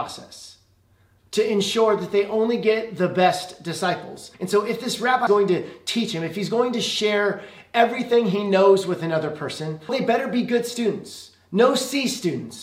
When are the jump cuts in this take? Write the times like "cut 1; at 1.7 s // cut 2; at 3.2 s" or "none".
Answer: cut 1; at 1.3 s // cut 2; at 4.3 s // cut 3; at 5.3 s // cut 4; at 9.9 s

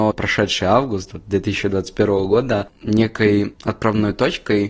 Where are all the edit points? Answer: cut 1; at 2.7 s

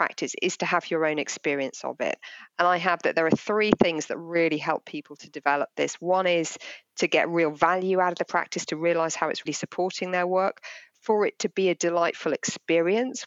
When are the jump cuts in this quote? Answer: cut 1; at 9.5 s

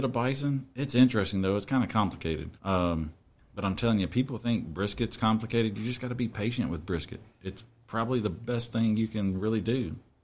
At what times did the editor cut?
cut 1; at 2.6 s

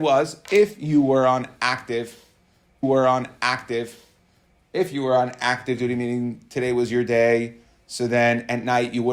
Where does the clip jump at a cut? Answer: cut 1; at 2.8 s

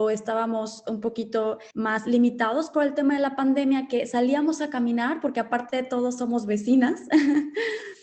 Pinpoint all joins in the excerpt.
cut 1; at 1.7 s

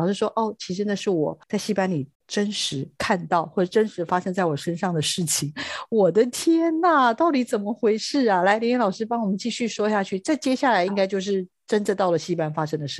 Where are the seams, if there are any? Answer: cut 1; at 1.4 s // cut 2; at 2.1 s

